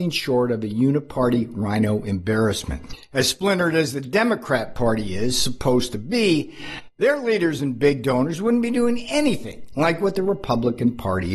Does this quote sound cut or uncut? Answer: uncut